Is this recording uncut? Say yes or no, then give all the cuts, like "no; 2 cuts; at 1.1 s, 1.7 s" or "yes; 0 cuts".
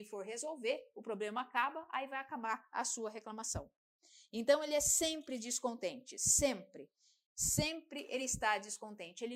yes; 0 cuts